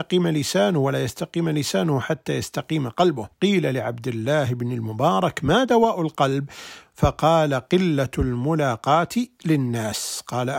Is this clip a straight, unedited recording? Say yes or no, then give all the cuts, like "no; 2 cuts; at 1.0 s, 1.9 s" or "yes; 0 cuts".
no; 1 cut; at 3.3 s